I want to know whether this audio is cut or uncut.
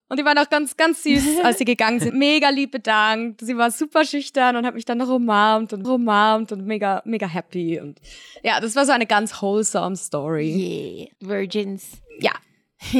cut